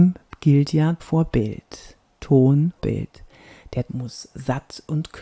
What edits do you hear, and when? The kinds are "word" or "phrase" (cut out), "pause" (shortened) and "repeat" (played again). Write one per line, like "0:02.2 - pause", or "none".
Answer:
0:01.0 - word
0:02.8 - word
0:03.9 - word